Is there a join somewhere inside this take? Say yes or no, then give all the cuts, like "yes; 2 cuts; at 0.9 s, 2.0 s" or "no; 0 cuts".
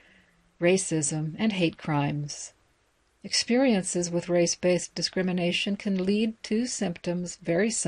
no; 0 cuts